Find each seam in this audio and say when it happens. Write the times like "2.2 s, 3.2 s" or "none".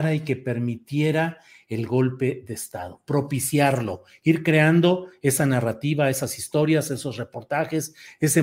none